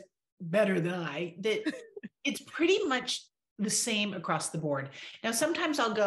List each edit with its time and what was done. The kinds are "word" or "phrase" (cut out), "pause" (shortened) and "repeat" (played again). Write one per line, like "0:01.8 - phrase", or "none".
none